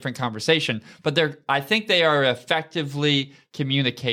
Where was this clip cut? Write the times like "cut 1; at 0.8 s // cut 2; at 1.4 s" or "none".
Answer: none